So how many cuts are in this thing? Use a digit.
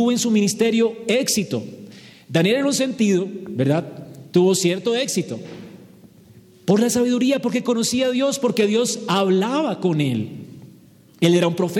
0